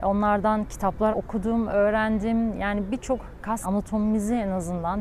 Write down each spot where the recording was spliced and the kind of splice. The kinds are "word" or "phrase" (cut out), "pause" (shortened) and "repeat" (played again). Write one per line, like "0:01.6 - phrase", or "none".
0:01.1 - word
0:03.6 - word